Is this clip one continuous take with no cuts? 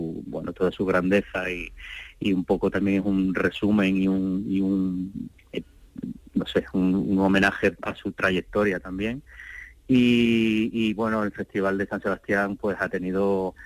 yes; 0 cuts

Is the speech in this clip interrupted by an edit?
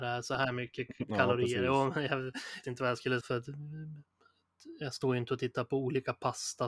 yes; 2 cuts; at 2.6 s, 3.2 s

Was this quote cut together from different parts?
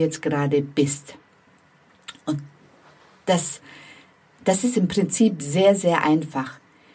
no; 0 cuts

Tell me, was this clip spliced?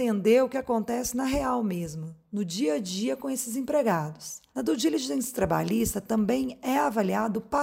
yes; 1 cut; at 4.5 s

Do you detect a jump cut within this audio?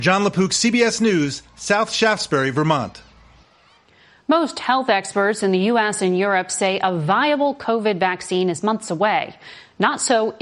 no; 0 cuts

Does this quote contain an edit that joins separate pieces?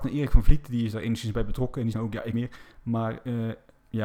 yes; 3 cuts; at 1.9 s, 2.3 s, 2.7 s

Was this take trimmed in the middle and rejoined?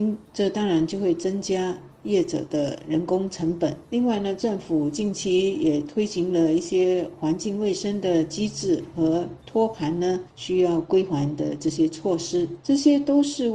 no; 0 cuts

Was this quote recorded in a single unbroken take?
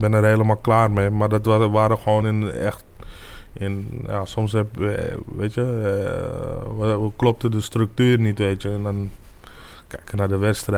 yes; 0 cuts

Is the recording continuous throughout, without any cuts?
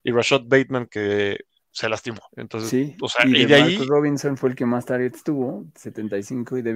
no; 1 cut; at 2.3 s

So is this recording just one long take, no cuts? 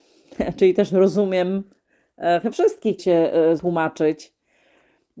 no; 3 cuts; at 2.5 s, 3.0 s, 3.6 s

